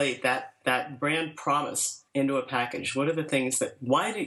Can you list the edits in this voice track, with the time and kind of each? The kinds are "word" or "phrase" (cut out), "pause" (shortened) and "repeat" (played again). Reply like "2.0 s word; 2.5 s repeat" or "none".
2.1 s pause